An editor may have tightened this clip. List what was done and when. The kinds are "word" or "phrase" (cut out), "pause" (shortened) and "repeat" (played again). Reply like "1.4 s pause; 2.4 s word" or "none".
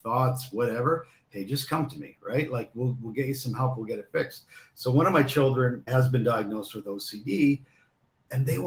5.9 s word